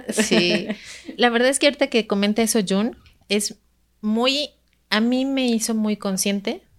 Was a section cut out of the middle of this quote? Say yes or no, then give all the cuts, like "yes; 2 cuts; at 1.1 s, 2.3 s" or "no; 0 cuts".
no; 0 cuts